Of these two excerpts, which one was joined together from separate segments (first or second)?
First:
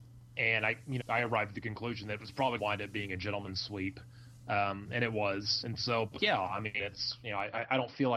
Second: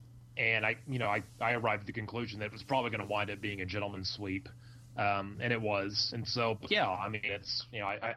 first